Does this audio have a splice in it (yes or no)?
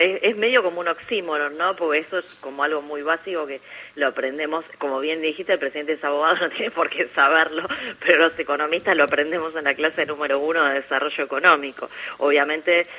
no